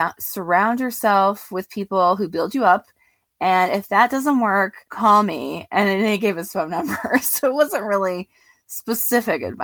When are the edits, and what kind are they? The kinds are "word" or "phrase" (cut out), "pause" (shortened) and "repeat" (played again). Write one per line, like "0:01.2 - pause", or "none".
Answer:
0:04.8 - pause